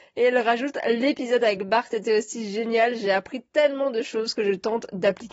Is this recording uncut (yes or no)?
yes